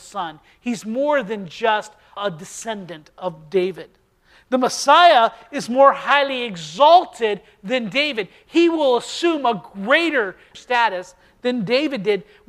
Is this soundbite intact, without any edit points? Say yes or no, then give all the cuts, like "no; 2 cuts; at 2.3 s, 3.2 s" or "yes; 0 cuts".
yes; 0 cuts